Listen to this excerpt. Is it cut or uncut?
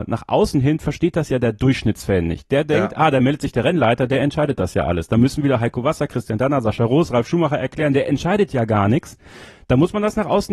uncut